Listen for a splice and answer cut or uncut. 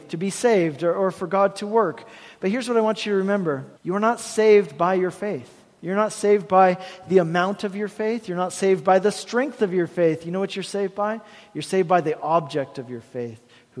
cut